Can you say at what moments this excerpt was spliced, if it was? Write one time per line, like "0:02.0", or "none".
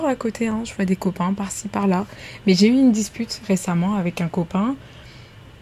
none

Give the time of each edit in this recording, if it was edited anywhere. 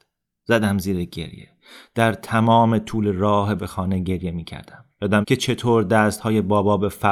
0:03.6
0:05.2

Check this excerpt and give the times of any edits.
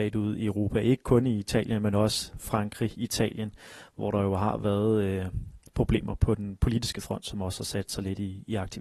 none

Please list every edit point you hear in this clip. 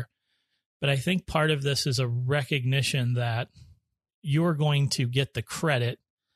none

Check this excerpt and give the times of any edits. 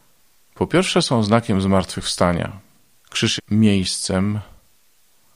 0:03.4

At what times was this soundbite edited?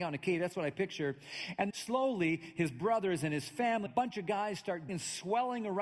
0:01.7
0:03.9
0:04.9

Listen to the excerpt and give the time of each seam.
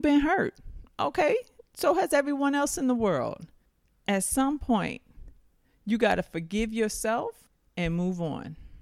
none

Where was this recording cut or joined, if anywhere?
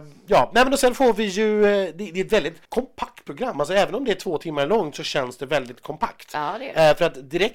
0:02.6

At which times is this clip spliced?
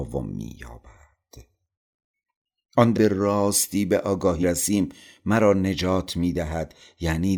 0:02.9
0:04.4

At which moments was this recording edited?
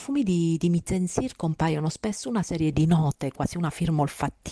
0:02.7

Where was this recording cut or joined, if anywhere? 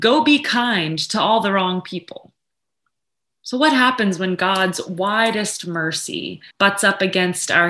0:03.0
0:06.5

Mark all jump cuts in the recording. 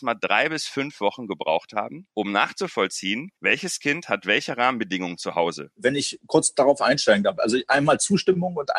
0:02.1
0:03.4

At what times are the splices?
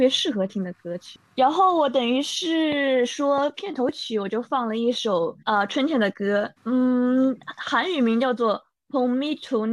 0:05.4
0:06.6

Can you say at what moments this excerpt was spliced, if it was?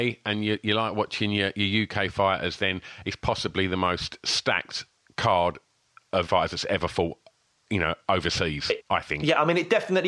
0:06.3

